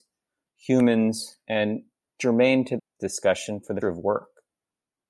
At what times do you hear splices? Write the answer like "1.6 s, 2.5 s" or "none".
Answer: 2.0 s, 2.8 s, 3.8 s